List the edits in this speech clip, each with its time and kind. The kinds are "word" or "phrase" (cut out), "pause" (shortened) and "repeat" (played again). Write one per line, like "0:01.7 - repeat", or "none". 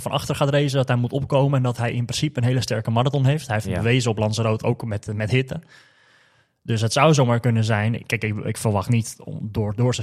none